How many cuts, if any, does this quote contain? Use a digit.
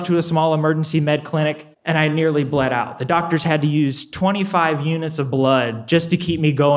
1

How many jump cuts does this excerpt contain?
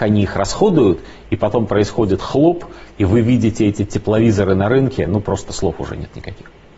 0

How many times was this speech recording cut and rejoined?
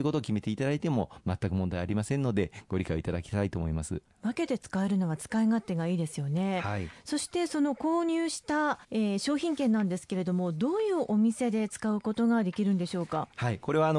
1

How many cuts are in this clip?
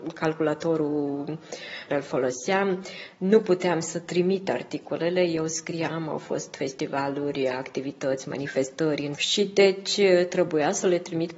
2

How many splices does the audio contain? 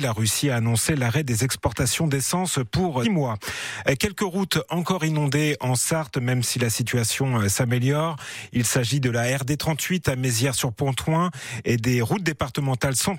1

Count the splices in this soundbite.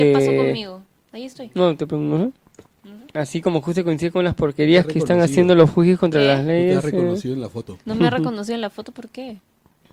2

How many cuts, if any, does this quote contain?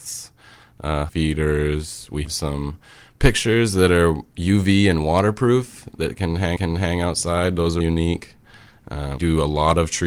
5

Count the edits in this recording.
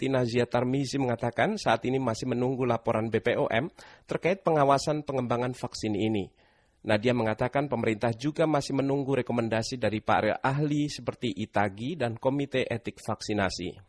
0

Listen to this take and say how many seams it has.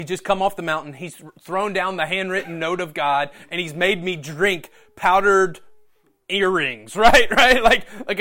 0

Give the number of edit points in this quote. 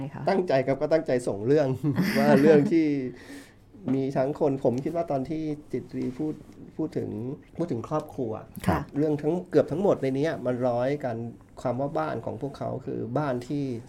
1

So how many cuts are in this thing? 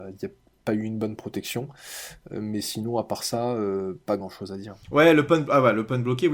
0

